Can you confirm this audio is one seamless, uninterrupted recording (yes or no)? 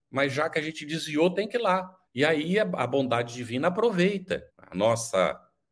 no